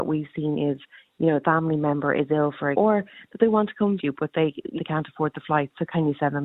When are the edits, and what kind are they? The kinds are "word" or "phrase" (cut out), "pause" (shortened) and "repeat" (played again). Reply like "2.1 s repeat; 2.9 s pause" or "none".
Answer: 1.4 s phrase; 2.7 s word; 4.0 s word; 4.8 s word